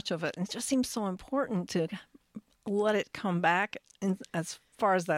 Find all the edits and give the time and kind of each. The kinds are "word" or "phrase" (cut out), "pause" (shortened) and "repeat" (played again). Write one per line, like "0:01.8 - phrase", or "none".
none